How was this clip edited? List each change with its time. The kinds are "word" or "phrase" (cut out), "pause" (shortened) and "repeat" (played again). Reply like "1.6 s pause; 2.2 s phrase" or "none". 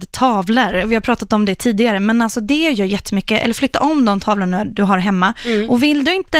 none